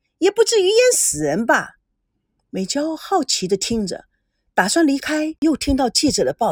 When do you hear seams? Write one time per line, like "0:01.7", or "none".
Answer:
0:05.4